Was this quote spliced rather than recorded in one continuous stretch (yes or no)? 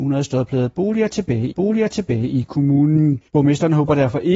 yes